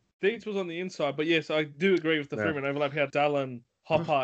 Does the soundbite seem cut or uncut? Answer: cut